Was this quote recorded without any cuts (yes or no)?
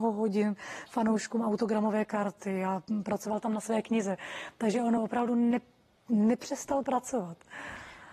yes